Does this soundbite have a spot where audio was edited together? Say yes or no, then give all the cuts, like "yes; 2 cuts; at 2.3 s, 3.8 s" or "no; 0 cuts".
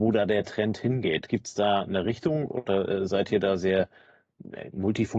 no; 0 cuts